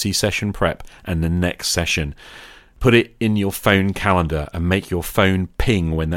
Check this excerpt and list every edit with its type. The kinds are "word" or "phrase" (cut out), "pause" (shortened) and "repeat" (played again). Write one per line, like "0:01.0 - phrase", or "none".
none